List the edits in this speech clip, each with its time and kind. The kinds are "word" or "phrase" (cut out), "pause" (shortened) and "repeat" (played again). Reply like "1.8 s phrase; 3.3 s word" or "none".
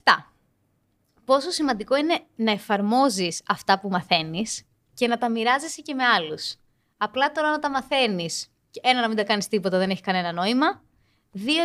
none